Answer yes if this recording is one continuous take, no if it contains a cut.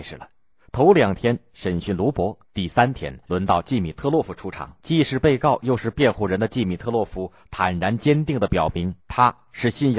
no